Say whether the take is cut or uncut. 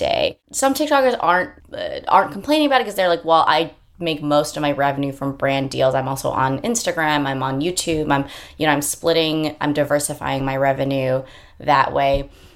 uncut